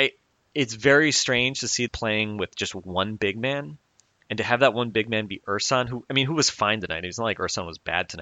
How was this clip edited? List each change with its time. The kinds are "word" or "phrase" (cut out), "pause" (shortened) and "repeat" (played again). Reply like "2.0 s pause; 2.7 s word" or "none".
1.9 s phrase